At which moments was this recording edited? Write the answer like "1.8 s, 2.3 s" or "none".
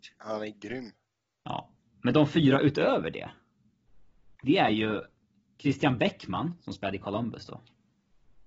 none

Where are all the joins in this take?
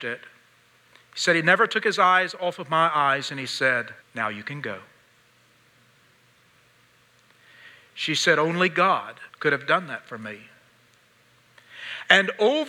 4.0 s, 9.3 s

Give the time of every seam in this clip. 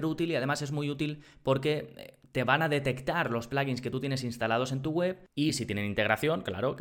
none

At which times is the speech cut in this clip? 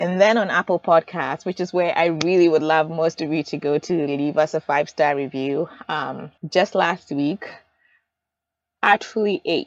6.4 s

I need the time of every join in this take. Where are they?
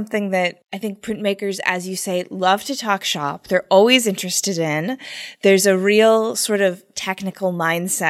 none

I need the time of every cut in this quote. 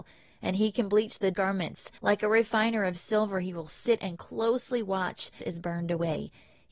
1.3 s, 2.0 s, 5.4 s

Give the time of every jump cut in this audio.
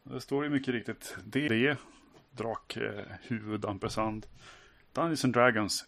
1.5 s

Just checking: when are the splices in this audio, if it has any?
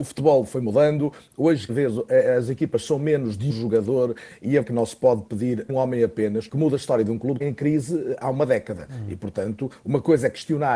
1.7 s, 3.5 s, 4.6 s, 5.7 s, 6.5 s, 7.4 s

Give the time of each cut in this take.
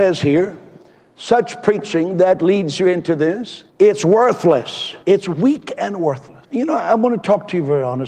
3.7 s, 5.0 s, 6.4 s

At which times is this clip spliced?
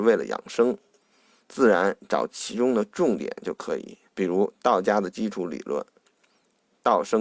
4.1 s

